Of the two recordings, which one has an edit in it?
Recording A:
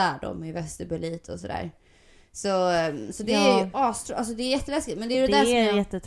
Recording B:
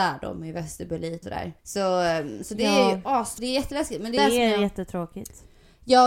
B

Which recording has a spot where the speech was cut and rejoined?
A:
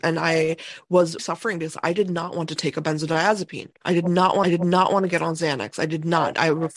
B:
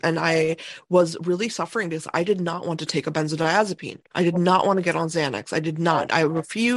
A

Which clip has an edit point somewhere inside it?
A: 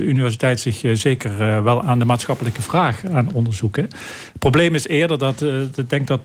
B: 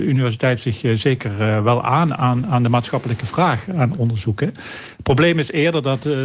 A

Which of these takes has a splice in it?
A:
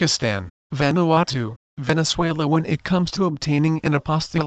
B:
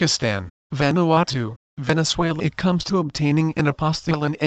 B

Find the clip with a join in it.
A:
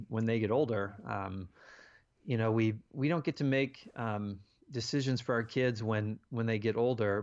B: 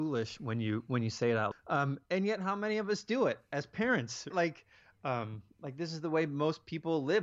B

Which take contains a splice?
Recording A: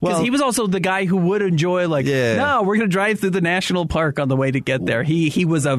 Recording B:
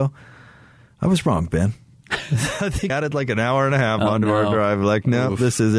B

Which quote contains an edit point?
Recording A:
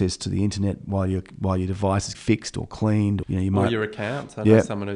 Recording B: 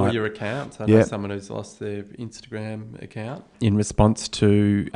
A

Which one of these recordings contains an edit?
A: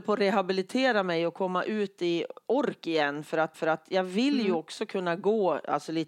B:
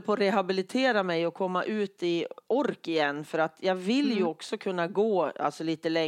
A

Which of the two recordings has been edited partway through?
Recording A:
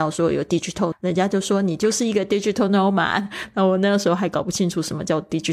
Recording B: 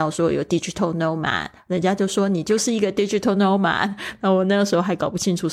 A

